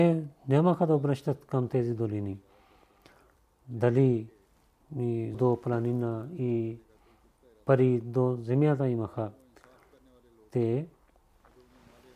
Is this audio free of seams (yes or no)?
no